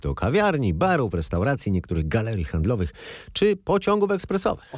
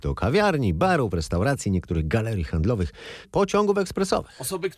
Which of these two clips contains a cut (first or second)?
second